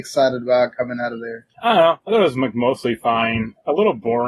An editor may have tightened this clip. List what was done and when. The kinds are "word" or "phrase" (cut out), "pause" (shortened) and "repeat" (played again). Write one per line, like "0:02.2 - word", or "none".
0:01.5 - pause